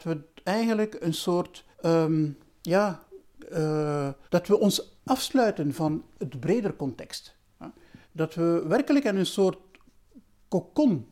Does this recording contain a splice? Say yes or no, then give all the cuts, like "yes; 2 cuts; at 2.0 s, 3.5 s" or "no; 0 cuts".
yes; 4 cuts; at 1.7 s, 4.3 s, 5.0 s, 8.0 s